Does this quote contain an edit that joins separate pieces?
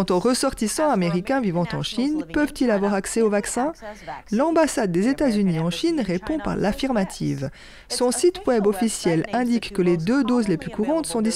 no; 0 cuts

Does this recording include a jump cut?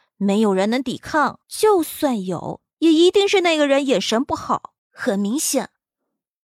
yes; 3 cuts; at 1.4 s, 2.7 s, 4.8 s

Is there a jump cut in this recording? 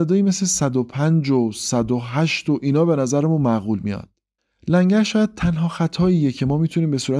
yes; 1 cut; at 4.4 s

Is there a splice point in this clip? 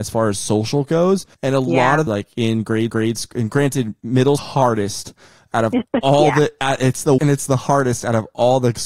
yes; 5 cuts; at 1.3 s, 2.1 s, 2.9 s, 4.4 s, 7.2 s

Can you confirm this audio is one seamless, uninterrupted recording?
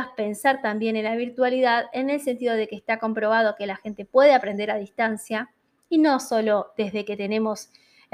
yes; 0 cuts

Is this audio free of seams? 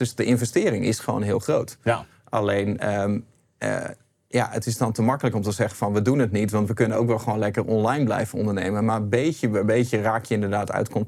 yes; 0 cuts

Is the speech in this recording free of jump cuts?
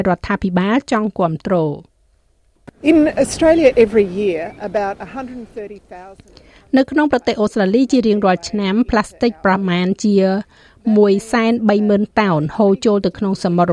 yes; 0 cuts

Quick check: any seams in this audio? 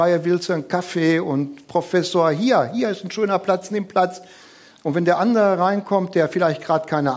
no; 0 cuts

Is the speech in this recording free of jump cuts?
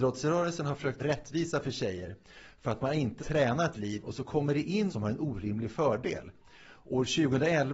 no; 4 cuts; at 1.0 s, 3.2 s, 3.7 s, 4.9 s

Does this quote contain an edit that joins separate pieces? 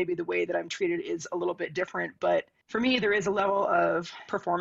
no; 0 cuts

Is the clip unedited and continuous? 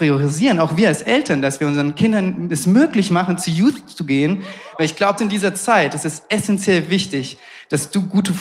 no; 1 cut; at 5.2 s

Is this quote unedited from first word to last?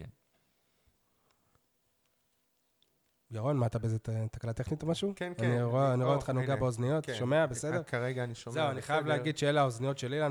yes; 0 cuts

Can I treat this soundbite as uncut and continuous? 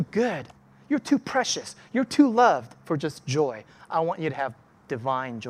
yes; 0 cuts

